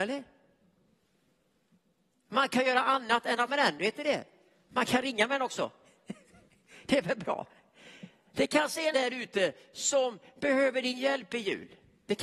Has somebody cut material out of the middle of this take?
yes; 2 cuts; at 3.5 s, 8.9 s

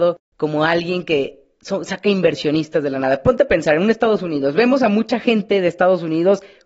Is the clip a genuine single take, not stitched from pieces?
yes; 0 cuts

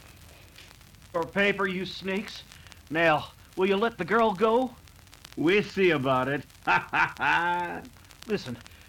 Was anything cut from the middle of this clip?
no; 0 cuts

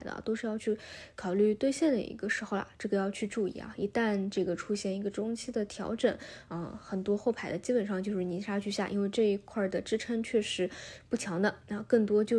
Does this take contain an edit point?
no; 0 cuts

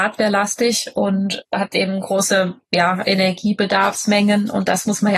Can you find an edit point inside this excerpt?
yes; 1 cut; at 1.4 s

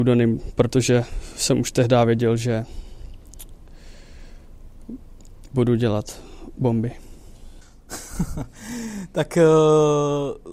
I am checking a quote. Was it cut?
no; 0 cuts

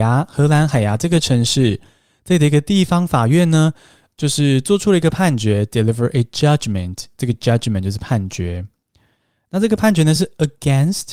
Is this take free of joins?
yes; 0 cuts

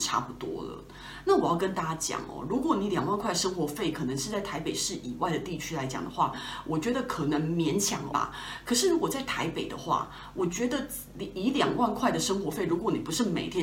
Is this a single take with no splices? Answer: no; 1 cut; at 8.1 s

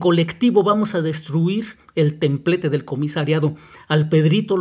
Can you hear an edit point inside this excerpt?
no; 0 cuts

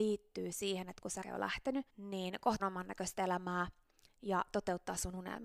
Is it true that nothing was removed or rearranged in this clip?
no; 3 cuts; at 1.2 s, 1.9 s, 2.6 s

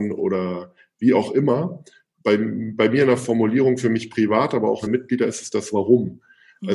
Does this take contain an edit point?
yes; 1 cut; at 4.9 s

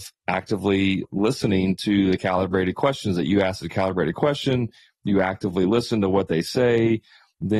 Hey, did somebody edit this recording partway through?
no; 0 cuts

